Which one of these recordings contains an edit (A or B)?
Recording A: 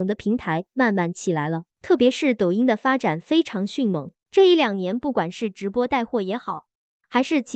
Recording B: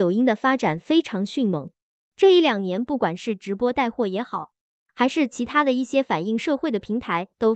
A